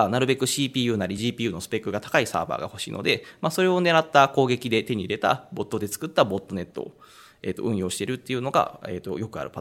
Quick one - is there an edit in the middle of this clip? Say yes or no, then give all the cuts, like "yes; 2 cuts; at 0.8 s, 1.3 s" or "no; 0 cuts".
no; 0 cuts